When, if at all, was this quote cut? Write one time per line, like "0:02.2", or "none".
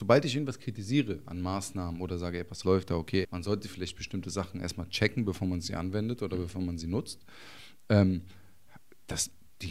0:02.6
0:03.2